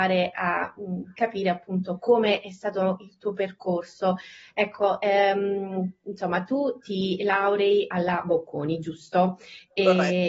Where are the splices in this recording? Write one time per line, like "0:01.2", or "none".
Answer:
none